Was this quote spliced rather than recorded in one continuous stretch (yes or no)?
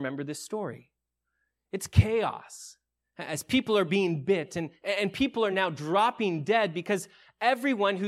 no